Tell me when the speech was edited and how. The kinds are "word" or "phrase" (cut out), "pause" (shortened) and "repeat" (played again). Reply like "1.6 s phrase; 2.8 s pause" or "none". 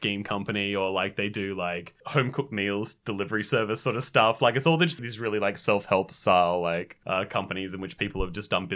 5.0 s word